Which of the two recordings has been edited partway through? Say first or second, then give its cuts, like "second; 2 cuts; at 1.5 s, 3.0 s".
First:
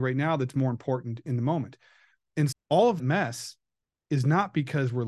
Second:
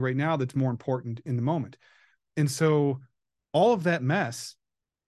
first; 2 cuts; at 2.5 s, 3.0 s